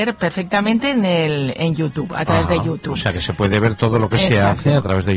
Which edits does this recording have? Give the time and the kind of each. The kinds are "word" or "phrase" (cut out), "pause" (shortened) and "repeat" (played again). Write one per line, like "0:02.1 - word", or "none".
none